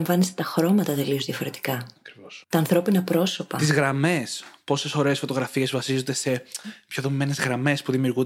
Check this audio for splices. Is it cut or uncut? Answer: cut